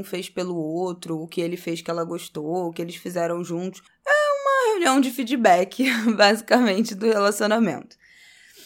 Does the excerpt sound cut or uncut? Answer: cut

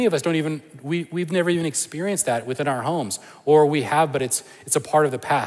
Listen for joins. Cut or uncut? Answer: uncut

